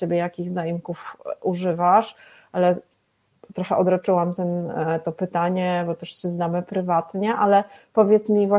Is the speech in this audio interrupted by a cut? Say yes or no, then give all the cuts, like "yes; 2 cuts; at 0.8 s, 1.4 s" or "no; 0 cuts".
no; 0 cuts